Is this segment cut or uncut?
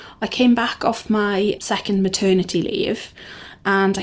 uncut